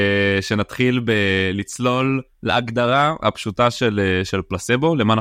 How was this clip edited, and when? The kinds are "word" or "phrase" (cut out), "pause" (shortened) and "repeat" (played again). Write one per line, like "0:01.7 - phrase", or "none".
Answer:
0:02.3 - pause

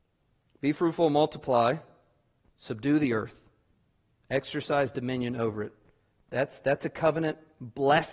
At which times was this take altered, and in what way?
none

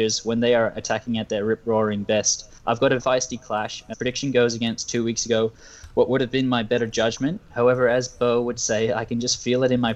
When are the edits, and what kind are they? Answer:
0:02.6 - pause
0:03.0 - word
0:03.9 - word

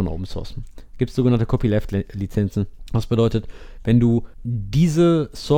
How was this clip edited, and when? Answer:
0:04.4 - word

